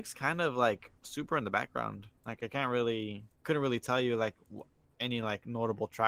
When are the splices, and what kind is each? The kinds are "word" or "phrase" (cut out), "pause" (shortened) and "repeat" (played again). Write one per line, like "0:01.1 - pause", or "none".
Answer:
0:01.0 - pause
0:02.2 - pause
0:03.3 - pause